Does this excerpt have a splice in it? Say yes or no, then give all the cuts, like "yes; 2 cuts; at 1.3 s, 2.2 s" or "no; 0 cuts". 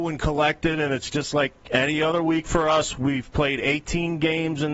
no; 0 cuts